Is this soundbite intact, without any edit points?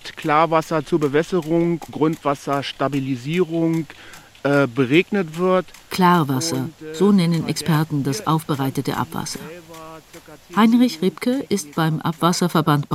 no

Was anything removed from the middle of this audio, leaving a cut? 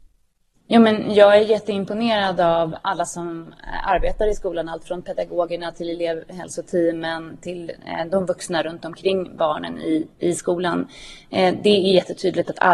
yes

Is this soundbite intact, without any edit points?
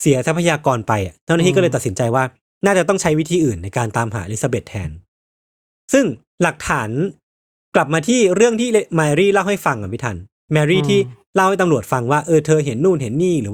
yes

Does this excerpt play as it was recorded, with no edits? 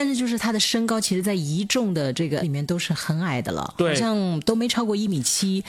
no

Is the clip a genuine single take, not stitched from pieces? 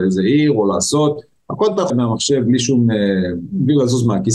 no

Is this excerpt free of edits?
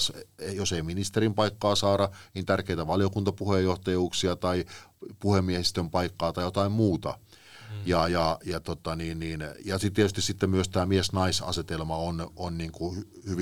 yes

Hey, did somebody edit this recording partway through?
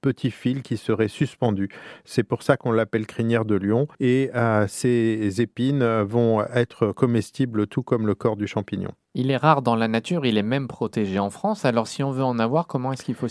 yes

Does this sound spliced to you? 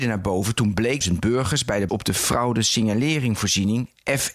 yes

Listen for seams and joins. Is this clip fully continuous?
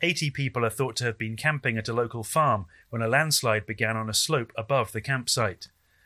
yes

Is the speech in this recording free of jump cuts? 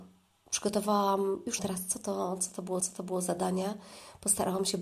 no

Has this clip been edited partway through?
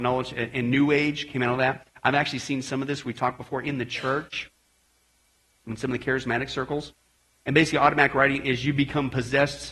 no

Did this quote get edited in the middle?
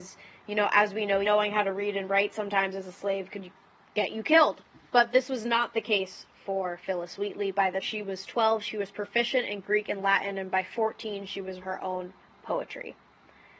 yes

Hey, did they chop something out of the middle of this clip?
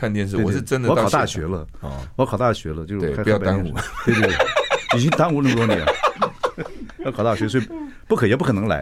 no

